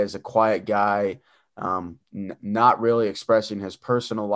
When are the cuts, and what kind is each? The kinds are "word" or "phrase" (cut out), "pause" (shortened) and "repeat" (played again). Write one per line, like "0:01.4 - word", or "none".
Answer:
none